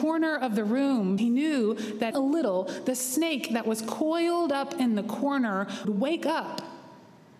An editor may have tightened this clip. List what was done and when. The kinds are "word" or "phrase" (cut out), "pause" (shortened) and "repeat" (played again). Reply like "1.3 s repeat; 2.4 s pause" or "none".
1.2 s word; 2.1 s phrase; 5.8 s word